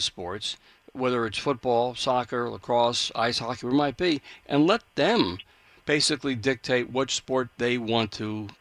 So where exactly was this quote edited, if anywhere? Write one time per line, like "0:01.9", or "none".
none